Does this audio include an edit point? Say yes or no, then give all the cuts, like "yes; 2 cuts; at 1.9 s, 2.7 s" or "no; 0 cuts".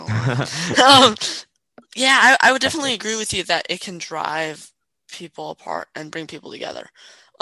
no; 0 cuts